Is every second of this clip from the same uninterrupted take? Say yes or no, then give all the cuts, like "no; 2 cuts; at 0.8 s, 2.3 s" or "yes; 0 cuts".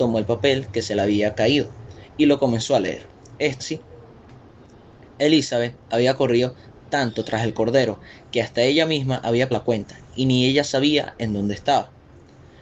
no; 2 cuts; at 3.6 s, 9.5 s